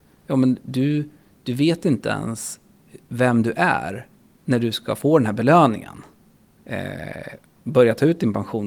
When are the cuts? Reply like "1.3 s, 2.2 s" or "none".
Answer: none